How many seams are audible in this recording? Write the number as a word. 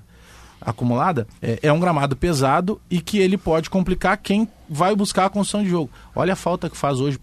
one